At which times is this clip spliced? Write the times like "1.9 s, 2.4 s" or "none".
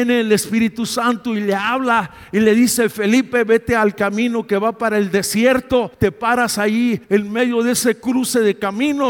5.9 s, 7.0 s